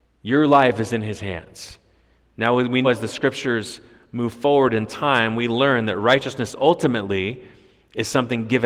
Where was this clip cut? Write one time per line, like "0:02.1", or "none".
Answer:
0:02.8